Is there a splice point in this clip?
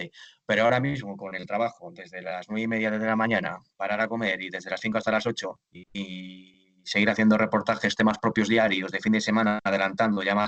no; 0 cuts

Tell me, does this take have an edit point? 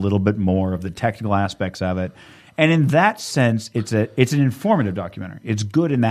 no; 0 cuts

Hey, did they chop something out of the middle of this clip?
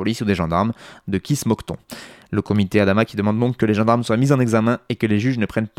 no; 0 cuts

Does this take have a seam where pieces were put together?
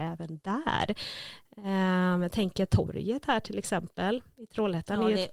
no; 0 cuts

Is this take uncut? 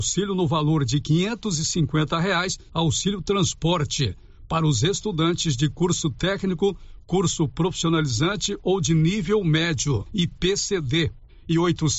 no; 1 cut; at 2.7 s

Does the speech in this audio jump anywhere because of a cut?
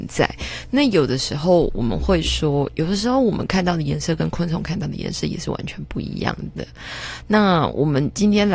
no; 0 cuts

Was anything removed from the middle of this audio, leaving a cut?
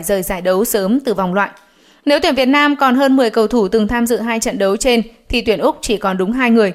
no; 0 cuts

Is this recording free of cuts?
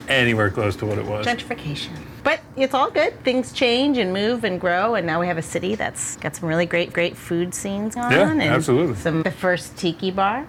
no; 4 cuts; at 6.1 s, 6.9 s, 8.0 s, 9.2 s

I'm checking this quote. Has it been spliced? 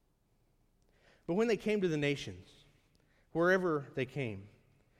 no; 0 cuts

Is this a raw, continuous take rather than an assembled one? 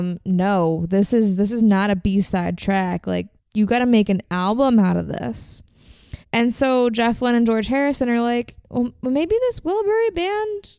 no; 3 cuts; at 3.4 s, 6.2 s, 8.6 s

